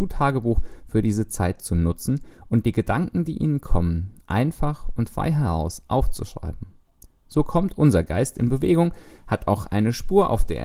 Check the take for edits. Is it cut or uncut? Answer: uncut